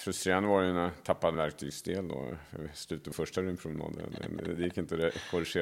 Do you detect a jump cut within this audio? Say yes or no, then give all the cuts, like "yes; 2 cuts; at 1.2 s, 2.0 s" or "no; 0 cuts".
yes; 2 cuts; at 1.3 s, 3.1 s